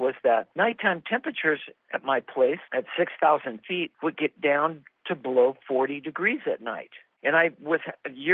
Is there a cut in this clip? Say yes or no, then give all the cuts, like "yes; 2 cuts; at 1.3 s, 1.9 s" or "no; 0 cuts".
yes; 1 cut; at 2.7 s